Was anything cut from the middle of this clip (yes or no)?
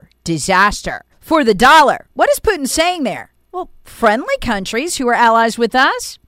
yes